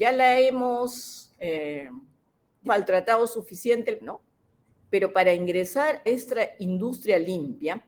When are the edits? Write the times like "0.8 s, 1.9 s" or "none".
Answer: 2.7 s, 4.0 s, 6.1 s